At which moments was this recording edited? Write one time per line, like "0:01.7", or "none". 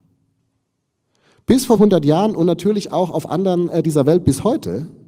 0:01.8
0:03.8